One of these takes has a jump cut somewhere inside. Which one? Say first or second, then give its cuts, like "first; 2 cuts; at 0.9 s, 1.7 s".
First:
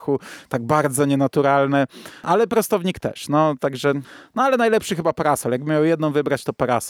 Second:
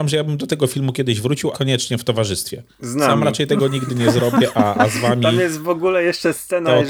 second; 1 cut; at 1.5 s